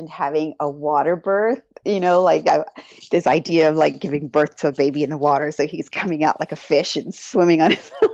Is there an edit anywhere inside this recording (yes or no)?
no